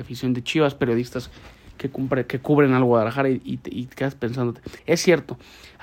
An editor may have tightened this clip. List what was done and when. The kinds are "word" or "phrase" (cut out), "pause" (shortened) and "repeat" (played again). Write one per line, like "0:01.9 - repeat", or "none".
0:04.8 - pause